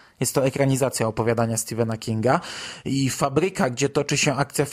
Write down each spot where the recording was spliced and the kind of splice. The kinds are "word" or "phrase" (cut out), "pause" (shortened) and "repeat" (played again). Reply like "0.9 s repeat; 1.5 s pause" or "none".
none